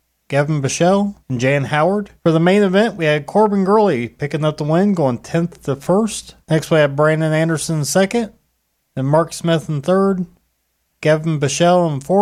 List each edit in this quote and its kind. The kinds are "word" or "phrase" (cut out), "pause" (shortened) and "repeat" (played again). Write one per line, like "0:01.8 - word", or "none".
0:01.2 - pause
0:02.2 - pause
0:06.4 - pause